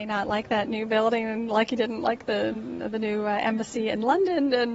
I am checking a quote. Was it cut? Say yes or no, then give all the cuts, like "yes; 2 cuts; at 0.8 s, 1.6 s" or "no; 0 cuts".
no; 0 cuts